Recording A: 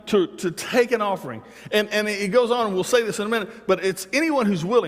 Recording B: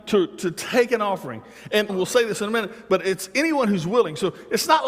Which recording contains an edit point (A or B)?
B